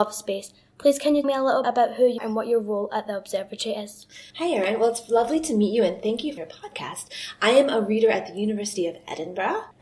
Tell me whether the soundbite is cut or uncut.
cut